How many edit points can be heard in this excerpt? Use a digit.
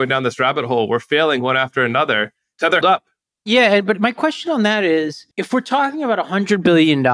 2